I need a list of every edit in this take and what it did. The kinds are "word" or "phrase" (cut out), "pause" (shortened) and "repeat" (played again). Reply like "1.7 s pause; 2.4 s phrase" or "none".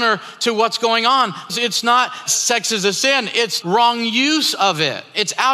1.5 s word; 2.3 s word; 3.6 s word